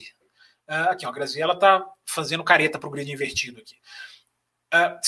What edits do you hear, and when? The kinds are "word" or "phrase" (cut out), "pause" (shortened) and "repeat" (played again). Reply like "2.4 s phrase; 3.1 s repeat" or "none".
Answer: none